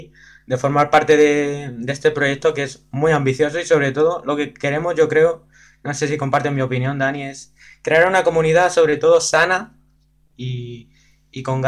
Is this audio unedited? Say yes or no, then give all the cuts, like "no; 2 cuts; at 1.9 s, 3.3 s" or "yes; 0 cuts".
yes; 0 cuts